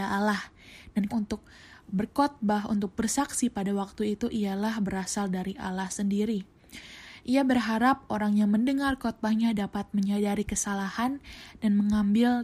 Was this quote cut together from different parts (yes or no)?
yes